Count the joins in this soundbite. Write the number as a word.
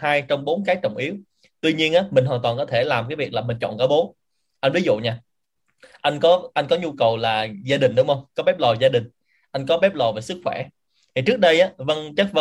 zero